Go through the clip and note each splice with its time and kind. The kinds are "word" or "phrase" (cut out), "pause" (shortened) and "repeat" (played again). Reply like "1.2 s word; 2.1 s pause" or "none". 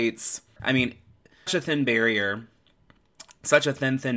1.5 s word